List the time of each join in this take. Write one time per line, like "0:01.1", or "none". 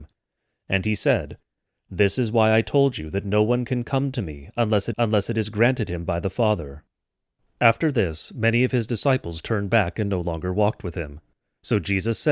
0:04.9